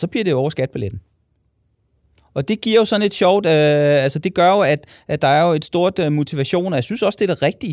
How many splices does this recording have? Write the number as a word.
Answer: zero